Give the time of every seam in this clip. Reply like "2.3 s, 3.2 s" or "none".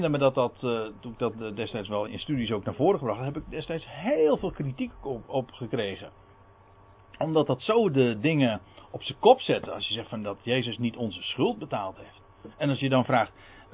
1.0 s, 2.1 s

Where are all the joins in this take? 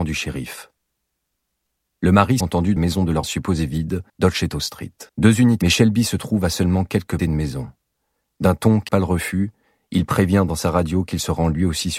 2.4 s, 2.8 s, 3.2 s, 4.1 s, 5.1 s, 5.6 s, 7.2 s, 8.9 s

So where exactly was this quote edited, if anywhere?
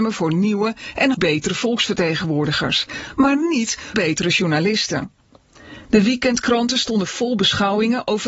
1.1 s, 3.9 s

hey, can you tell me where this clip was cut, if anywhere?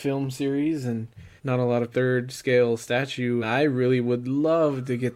1.4 s, 1.9 s, 3.4 s

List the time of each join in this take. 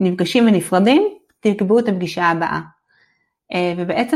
none

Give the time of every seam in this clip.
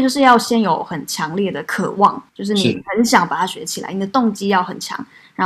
2.3 s

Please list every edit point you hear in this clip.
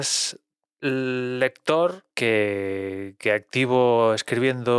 2.1 s

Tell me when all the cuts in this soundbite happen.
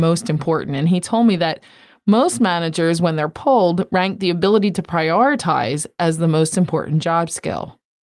none

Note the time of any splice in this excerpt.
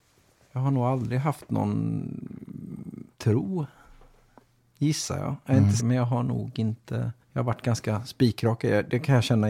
3.1 s, 5.8 s, 7.2 s

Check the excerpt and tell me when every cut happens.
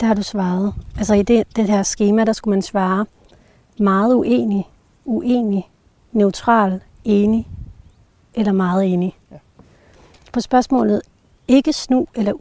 none

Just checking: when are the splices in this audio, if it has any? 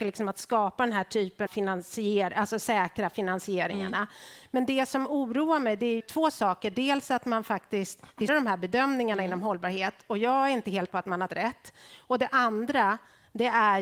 1.5 s, 6.0 s, 8.3 s, 10.9 s, 11.3 s

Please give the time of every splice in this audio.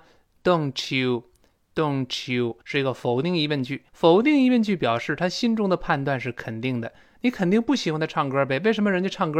2.6 s, 3.9 s

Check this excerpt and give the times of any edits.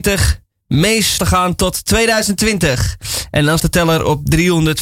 1.2 s, 3.6 s

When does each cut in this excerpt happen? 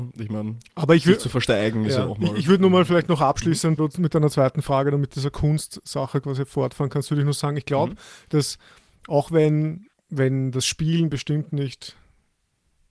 3.8 s, 9.9 s

